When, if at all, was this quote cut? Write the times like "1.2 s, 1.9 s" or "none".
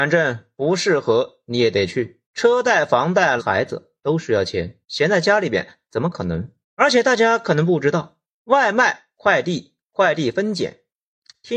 2.2 s, 3.4 s, 4.8 s, 6.6 s, 8.2 s

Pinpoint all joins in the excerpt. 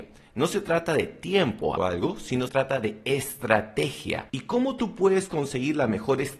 1.8 s, 2.5 s, 4.3 s

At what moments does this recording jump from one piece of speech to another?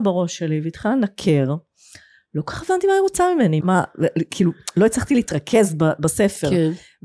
3.6 s

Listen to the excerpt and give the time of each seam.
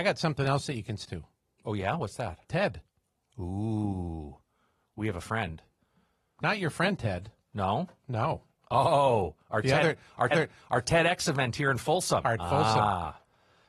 1.0 s, 10.3 s, 12.4 s

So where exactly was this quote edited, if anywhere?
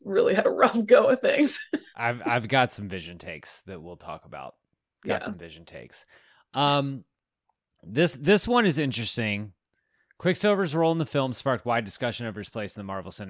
none

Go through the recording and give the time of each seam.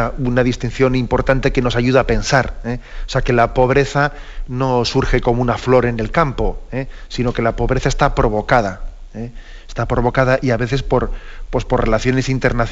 none

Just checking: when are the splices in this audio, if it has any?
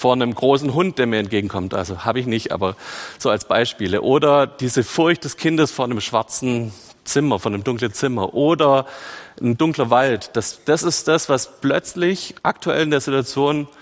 12.4 s

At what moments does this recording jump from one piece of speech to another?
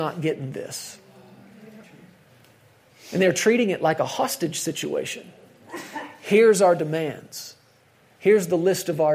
none

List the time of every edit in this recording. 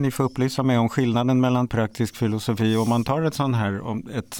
1.7 s

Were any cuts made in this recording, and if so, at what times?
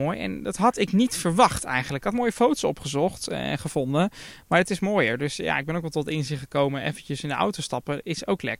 none

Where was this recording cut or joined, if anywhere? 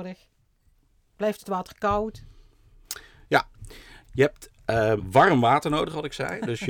5.0 s

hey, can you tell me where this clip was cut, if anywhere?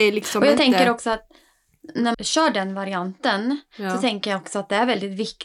2.1 s

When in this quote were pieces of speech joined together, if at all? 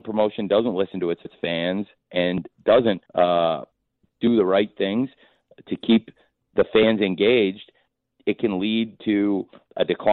1.3 s, 3.1 s

